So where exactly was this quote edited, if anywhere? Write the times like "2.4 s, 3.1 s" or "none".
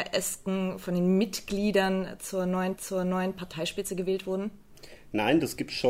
2.8 s